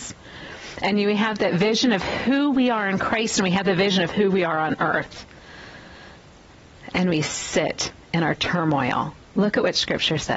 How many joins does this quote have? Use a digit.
1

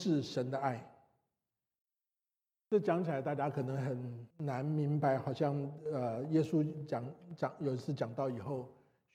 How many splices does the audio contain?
1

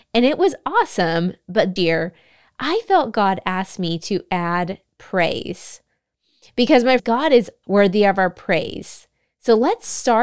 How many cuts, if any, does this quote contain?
3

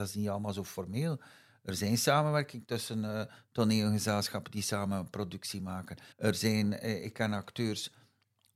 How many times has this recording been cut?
1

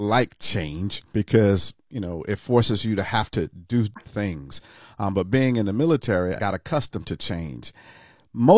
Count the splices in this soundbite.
3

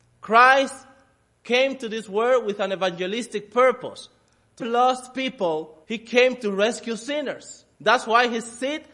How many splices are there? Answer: 3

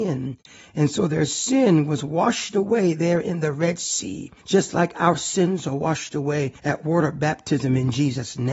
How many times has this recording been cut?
2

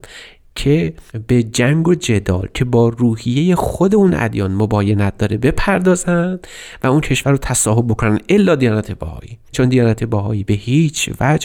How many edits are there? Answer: 1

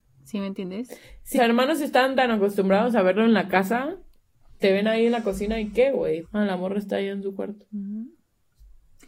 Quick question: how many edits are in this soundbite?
3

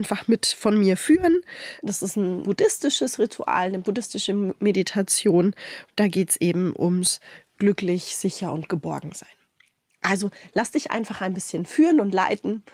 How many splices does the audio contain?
0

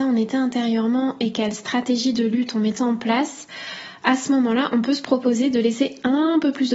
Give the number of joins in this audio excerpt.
0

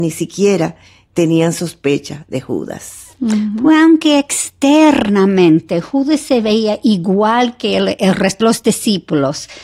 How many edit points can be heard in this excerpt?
1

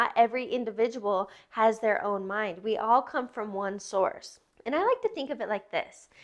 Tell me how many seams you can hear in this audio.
1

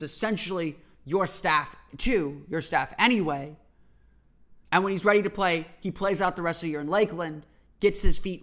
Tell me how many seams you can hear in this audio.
1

